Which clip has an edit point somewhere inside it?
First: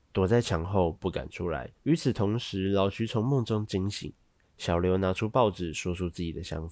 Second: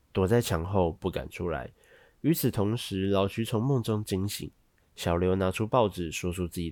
first; 1 cut; at 1.8 s

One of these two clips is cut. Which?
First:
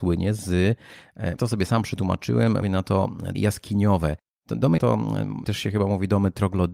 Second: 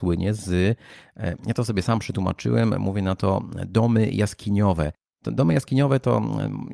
first; 5 cuts; at 1.4 s, 2.6 s, 3.3 s, 4.8 s, 5.4 s

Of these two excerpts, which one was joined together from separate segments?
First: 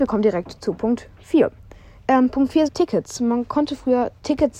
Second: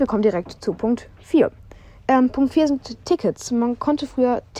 first; 1 cut; at 2.7 s

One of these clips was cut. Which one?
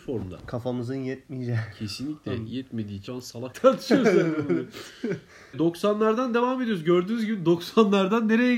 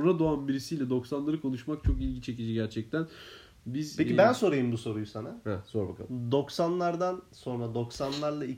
first; 3 cuts; at 3.1 s, 3.5 s, 5.5 s

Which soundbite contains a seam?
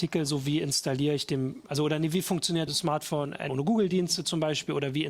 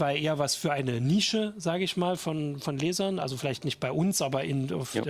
first; 3 cuts; at 1.7 s, 2.7 s, 3.5 s

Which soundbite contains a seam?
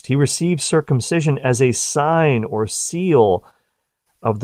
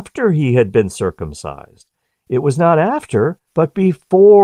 second; 2 cuts; at 2.0 s, 3.5 s

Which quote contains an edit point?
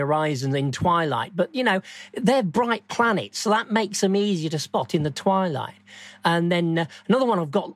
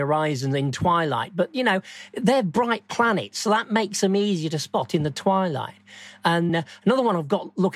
second; 1 cut; at 6.5 s

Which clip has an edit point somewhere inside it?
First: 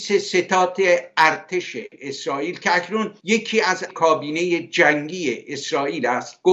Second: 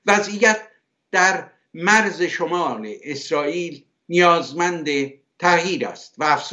first; 2 cuts; at 3.2 s, 3.9 s

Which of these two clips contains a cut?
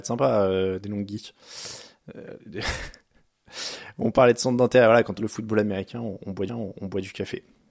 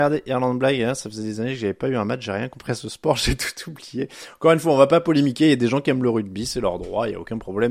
first; 3 cuts; at 2.4 s, 5.2 s, 6.5 s

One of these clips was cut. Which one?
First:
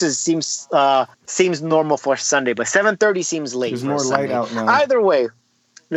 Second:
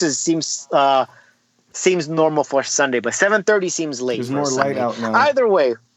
first; 1 cut; at 1.1 s

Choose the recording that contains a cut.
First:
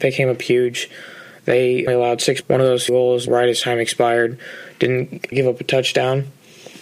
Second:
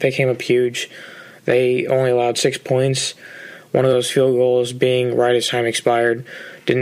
first; 5 cuts; at 1.9 s, 2.4 s, 2.9 s, 3.3 s, 5.3 s

